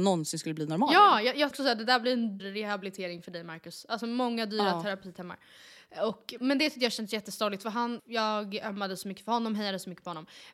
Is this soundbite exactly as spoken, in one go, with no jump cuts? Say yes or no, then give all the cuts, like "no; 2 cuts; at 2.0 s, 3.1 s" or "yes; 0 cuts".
no; 4 cuts; at 1.5 s, 2.4 s, 6.4 s, 8.0 s